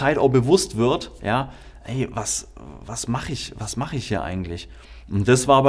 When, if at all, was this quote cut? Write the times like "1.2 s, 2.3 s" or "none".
none